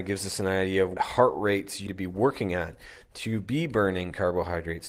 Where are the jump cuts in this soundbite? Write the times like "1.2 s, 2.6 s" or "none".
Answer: 1.0 s, 1.9 s